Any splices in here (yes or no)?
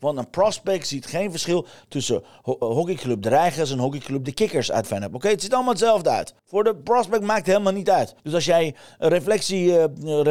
yes